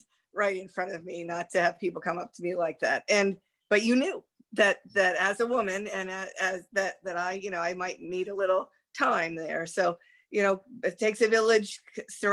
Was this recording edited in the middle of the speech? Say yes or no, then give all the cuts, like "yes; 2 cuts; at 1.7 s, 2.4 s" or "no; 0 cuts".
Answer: no; 0 cuts